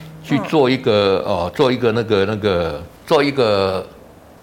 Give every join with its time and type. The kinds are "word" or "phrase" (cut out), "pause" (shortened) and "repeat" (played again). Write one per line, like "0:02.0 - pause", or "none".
0:03.0 - pause